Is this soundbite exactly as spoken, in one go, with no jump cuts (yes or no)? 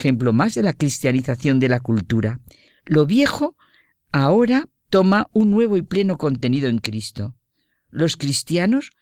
no